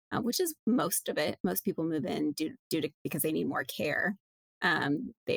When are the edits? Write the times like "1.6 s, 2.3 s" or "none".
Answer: 2.6 s